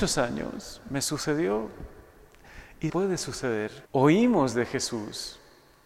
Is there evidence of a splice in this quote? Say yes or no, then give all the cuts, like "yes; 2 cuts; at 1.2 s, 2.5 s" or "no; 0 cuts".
yes; 2 cuts; at 2.9 s, 3.9 s